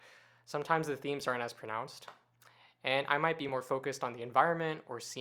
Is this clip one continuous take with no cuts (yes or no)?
yes